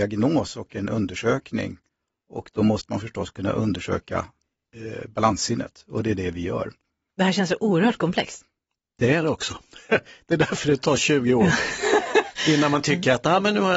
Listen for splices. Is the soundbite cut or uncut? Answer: uncut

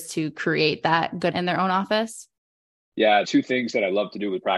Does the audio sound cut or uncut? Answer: cut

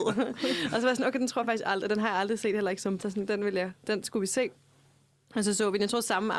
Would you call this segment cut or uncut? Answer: cut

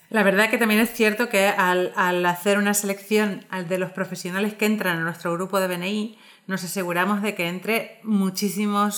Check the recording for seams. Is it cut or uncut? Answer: uncut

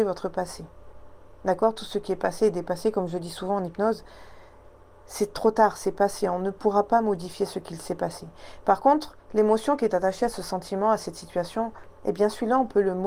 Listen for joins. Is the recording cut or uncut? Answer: uncut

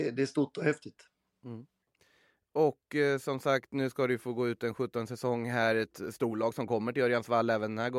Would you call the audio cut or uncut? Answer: uncut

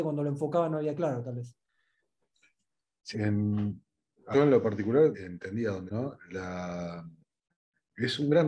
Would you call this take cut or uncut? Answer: cut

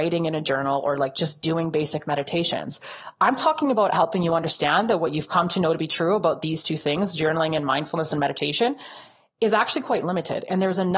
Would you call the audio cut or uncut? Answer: cut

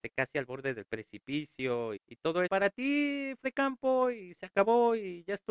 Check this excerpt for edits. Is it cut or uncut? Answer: cut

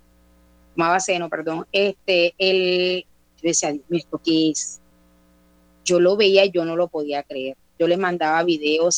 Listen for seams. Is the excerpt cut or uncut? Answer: uncut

